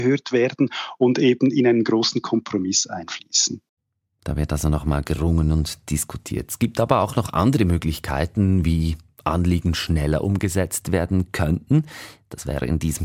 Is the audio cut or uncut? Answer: uncut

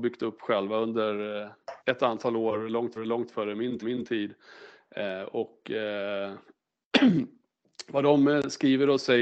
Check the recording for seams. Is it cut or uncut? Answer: cut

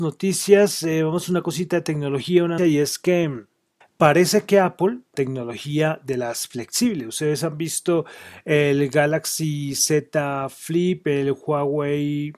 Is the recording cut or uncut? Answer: cut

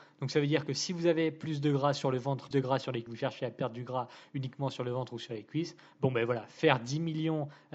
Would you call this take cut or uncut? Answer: cut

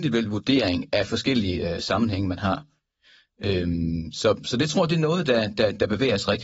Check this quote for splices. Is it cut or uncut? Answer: uncut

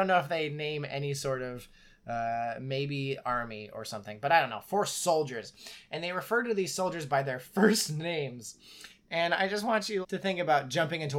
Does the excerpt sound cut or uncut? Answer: cut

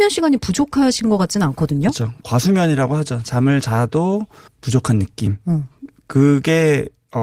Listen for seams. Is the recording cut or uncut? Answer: cut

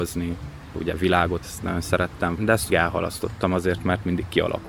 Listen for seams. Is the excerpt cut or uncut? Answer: cut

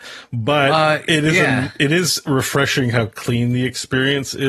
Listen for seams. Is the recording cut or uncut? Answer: uncut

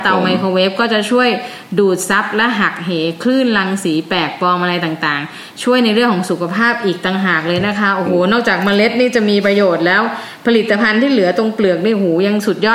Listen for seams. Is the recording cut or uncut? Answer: uncut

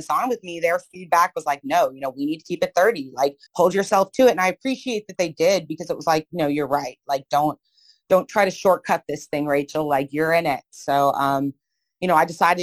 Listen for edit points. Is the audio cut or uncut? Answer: cut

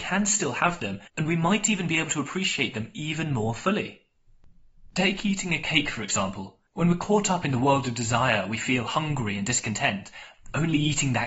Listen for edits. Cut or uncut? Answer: cut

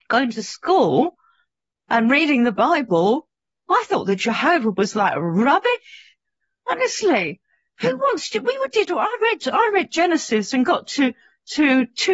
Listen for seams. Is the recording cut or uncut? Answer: uncut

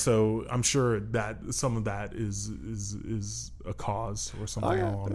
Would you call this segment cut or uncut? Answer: uncut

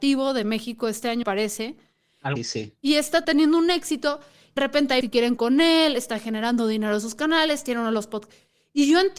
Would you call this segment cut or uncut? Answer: cut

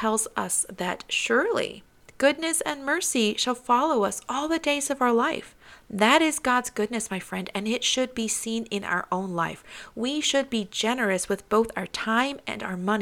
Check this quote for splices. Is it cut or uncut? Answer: uncut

